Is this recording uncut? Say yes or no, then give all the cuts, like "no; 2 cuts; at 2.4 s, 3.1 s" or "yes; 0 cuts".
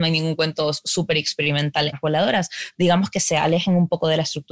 no; 2 cuts; at 1.9 s, 2.7 s